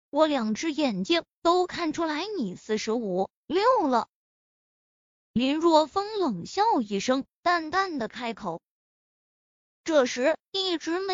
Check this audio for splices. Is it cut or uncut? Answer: uncut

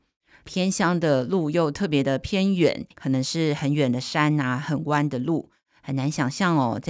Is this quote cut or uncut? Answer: cut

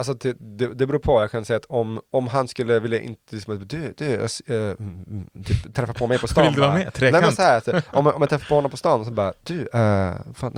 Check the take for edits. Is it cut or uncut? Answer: uncut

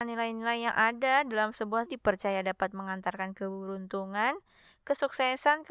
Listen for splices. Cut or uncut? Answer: cut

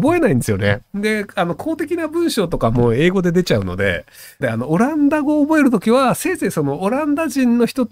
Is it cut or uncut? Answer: cut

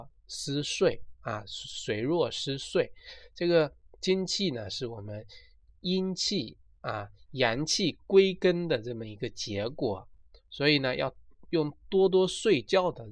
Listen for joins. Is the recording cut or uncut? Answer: uncut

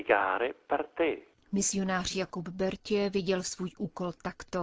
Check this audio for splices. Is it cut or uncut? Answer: uncut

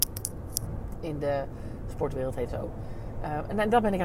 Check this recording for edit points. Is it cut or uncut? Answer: cut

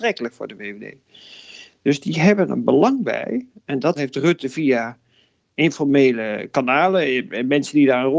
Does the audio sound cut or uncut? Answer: cut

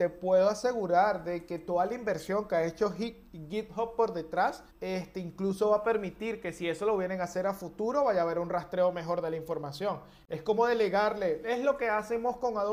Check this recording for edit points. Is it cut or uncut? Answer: cut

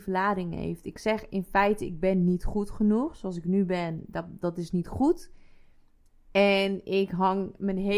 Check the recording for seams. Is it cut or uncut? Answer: uncut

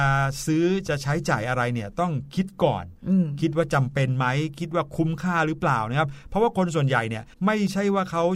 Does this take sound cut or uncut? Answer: cut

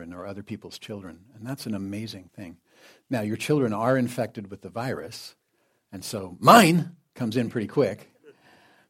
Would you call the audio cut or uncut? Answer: uncut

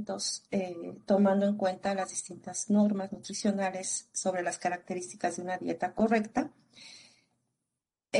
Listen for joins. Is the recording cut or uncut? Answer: uncut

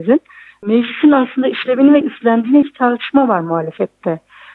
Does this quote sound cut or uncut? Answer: cut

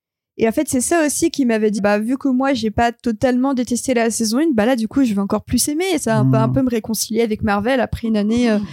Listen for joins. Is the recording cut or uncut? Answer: cut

